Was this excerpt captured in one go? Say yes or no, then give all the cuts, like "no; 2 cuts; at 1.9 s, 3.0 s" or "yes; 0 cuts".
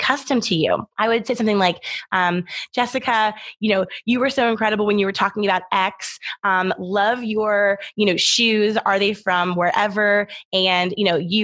no; 1 cut; at 0.9 s